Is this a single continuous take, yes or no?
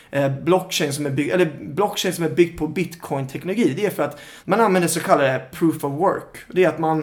no